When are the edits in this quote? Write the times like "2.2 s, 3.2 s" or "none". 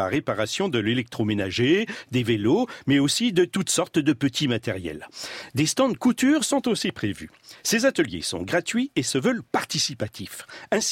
none